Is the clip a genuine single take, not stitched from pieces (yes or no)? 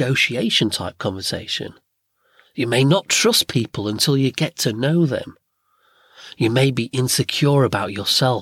yes